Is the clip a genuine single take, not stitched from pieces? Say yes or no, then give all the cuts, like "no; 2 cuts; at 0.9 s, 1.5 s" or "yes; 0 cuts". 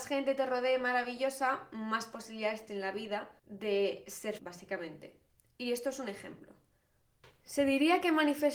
no; 3 cuts; at 2.7 s, 3.4 s, 4.4 s